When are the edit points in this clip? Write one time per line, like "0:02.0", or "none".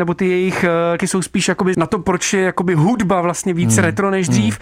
0:01.0
0:01.7